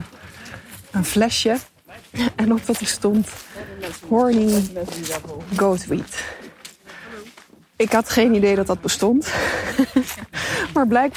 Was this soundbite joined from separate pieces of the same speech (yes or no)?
yes